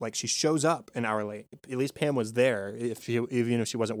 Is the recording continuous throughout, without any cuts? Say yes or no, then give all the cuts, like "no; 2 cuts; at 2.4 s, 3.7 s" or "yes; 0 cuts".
yes; 0 cuts